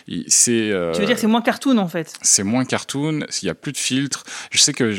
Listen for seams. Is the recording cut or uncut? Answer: uncut